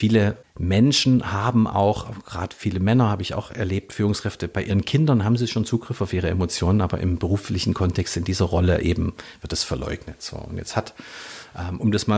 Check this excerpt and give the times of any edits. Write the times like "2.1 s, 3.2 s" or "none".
none